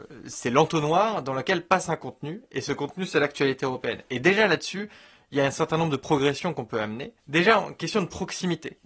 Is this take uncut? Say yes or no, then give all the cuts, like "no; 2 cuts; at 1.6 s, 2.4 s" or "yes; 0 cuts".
no; 1 cut; at 7.2 s